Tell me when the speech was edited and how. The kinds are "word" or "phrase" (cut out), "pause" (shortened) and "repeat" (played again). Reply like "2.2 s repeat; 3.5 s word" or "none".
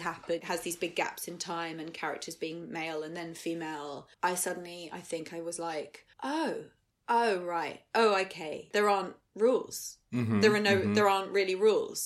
4.1 s pause; 6.1 s pause